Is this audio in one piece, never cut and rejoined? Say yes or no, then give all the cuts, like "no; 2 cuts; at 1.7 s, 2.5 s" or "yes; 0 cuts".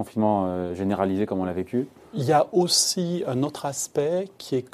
yes; 0 cuts